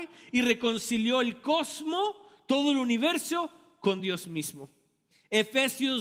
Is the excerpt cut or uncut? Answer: uncut